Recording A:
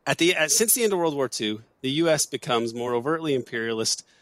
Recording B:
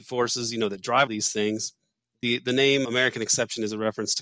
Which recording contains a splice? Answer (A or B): B